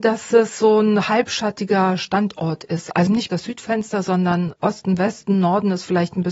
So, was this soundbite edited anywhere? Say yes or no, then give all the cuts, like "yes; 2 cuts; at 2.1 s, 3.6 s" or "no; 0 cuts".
yes; 1 cut; at 3.1 s